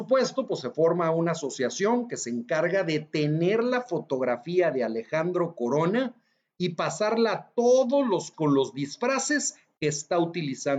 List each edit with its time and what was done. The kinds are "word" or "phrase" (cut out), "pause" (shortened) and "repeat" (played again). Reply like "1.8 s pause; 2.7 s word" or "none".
8.3 s word